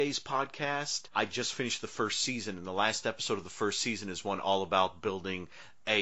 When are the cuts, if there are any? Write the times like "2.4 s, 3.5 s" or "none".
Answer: 1.1 s